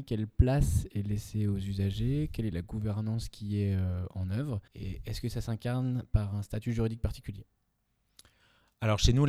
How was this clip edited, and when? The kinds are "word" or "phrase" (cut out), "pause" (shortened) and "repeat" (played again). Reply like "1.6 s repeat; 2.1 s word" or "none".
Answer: 4.7 s pause

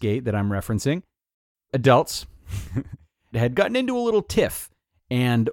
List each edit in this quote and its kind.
1.7 s word; 3.3 s word

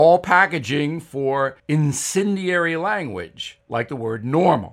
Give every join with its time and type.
1.6 s pause; 3.6 s pause

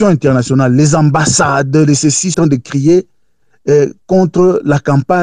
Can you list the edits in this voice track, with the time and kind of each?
2.3 s phrase

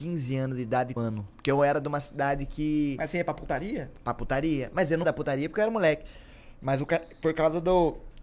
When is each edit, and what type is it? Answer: 1.0 s word; 5.0 s word

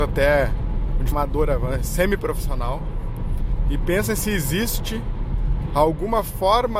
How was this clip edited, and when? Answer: 1.1 s word

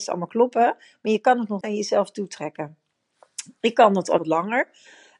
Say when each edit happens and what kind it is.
1.6 s word; 4.2 s word

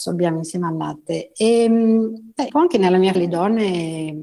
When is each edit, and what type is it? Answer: 2.5 s word; 3.1 s word

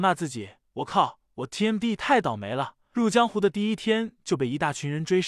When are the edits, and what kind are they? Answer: none

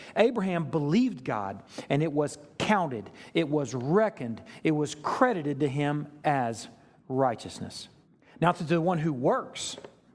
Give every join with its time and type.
8.1 s pause

